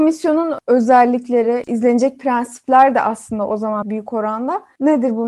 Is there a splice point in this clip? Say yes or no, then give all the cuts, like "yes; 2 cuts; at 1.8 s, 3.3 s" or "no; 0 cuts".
yes; 1 cut; at 3.8 s